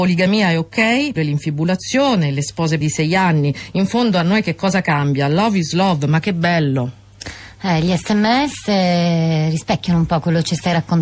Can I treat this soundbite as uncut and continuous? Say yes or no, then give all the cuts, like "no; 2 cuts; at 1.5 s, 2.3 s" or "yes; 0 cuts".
no; 2 cuts; at 1.2 s, 2.8 s